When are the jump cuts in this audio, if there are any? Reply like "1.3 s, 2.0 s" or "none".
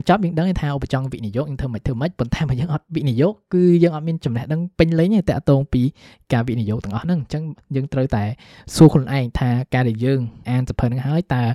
10.4 s